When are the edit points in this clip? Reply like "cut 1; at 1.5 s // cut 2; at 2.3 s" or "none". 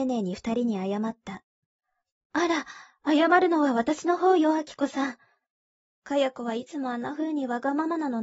none